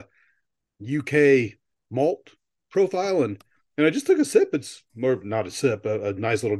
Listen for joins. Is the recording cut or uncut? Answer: uncut